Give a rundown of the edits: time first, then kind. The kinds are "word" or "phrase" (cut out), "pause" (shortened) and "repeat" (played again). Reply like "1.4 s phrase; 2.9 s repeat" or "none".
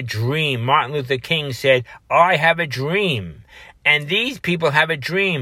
none